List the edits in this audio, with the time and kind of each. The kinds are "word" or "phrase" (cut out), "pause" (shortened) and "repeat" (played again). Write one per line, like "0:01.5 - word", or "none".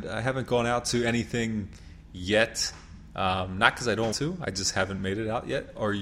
0:04.1 - word